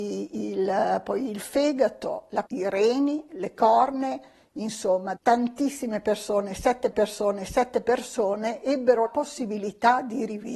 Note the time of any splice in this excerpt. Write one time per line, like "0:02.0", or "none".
0:02.5
0:05.2
0:06.9
0:09.1

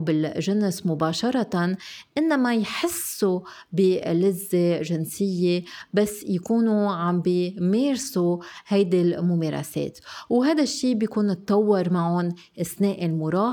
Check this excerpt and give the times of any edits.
none

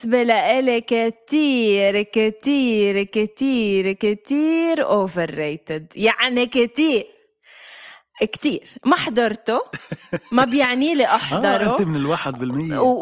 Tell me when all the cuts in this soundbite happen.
none

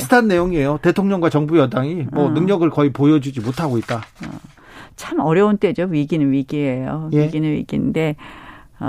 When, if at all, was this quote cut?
none

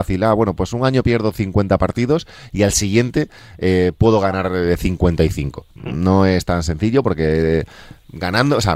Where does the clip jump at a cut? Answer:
0:05.7

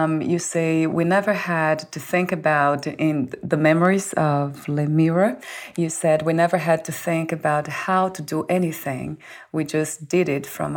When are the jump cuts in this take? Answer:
none

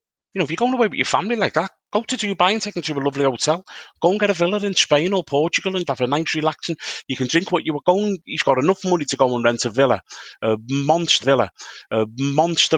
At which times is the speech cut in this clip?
0:05.9
0:11.2

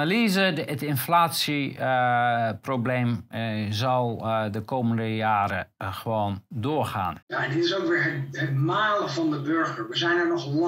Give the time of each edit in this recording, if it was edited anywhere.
0:07.2

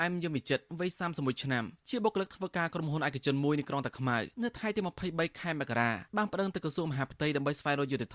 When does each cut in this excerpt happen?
0:01.8
0:04.3
0:06.1

